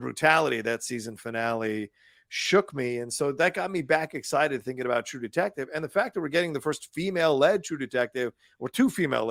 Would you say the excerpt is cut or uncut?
uncut